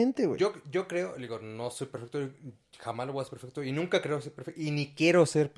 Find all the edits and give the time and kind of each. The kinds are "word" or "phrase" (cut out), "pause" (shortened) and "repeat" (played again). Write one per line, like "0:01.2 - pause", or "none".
none